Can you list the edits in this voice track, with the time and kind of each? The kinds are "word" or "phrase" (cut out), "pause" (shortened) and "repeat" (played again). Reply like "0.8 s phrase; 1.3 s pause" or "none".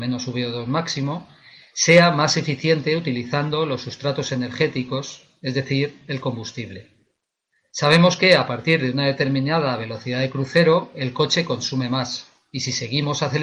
none